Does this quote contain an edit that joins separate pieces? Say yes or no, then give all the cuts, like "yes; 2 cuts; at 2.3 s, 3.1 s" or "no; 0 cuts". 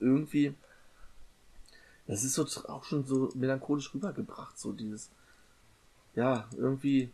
no; 0 cuts